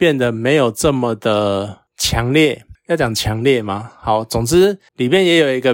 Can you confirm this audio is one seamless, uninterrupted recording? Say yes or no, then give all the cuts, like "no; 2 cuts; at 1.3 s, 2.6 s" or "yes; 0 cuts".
yes; 0 cuts